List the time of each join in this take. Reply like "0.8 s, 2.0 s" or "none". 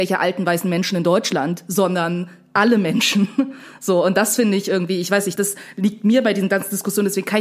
5.4 s